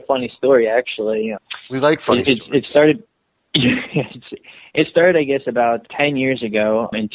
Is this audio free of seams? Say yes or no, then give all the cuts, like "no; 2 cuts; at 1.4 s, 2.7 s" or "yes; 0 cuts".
yes; 0 cuts